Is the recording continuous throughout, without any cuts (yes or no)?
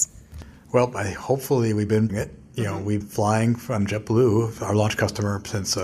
no